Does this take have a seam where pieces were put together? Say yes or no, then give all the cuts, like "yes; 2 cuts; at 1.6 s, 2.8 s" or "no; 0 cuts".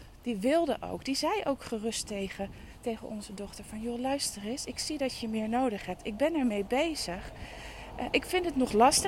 no; 0 cuts